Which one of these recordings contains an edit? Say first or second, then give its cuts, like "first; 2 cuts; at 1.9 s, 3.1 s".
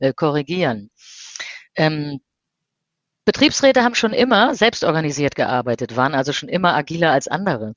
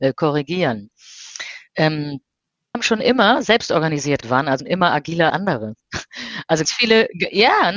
second; 5 cuts; at 2.7 s, 4.2 s, 4.6 s, 5.3 s, 6.6 s